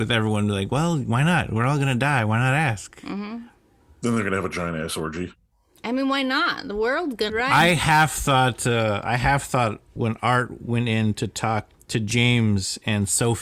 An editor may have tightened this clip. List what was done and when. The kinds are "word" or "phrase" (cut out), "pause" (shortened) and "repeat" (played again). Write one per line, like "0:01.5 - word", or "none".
0:07.3 - word
0:10.0 - word
0:11.7 - word